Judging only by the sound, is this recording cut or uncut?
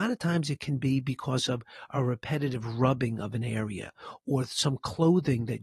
uncut